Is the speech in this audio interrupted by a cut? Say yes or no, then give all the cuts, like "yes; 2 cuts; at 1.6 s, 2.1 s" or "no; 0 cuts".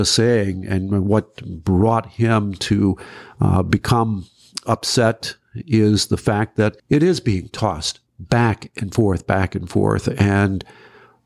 yes; 2 cuts; at 6.8 s, 8.1 s